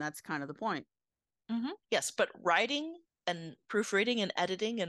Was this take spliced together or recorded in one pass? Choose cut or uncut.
cut